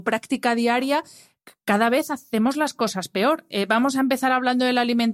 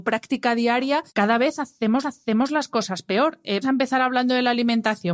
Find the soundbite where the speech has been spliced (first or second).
second